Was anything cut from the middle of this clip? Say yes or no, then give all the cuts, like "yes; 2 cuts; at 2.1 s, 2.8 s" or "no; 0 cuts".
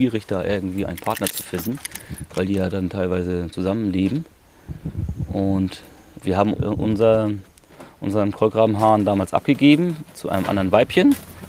yes; 3 cuts; at 3.5 s, 6.2 s, 6.5 s